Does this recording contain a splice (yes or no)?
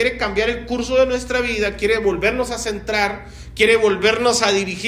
no